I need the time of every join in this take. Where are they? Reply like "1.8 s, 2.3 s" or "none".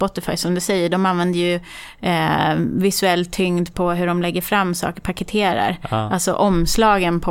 none